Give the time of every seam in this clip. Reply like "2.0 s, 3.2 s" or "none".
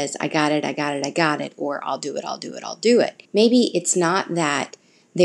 3.2 s